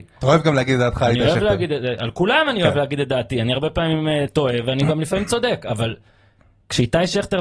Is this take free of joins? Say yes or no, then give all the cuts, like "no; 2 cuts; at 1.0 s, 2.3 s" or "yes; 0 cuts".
yes; 0 cuts